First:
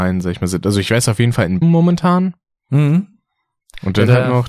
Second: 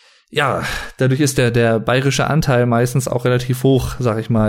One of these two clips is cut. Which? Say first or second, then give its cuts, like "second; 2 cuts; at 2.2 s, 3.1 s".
first; 1 cut; at 1.6 s